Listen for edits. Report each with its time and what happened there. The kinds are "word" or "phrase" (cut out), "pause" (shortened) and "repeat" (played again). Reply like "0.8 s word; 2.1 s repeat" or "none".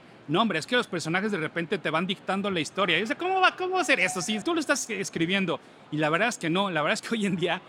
4.4 s phrase